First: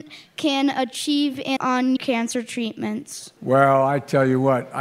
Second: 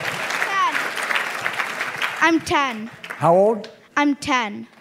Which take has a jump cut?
first; 3 cuts; at 1.6 s, 2.0 s, 3.4 s

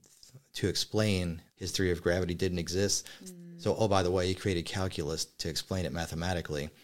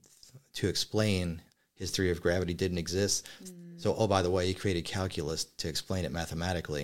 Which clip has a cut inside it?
first; 1 cut; at 1.5 s

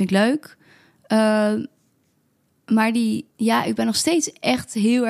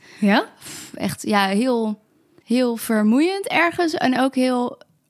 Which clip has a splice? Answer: first; 1 cut; at 3.3 s

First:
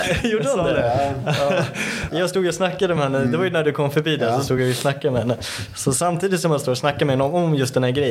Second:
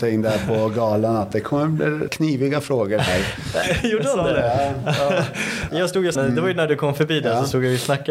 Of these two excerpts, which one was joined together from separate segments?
second; 2 cuts; at 2.1 s, 6.2 s

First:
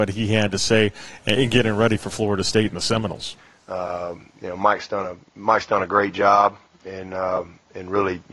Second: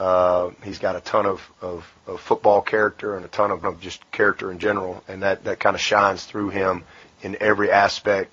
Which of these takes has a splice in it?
second; 2 cuts; at 3.6 s, 7.0 s

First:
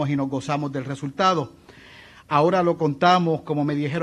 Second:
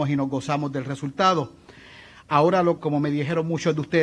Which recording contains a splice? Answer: second; 1 cut; at 2.8 s

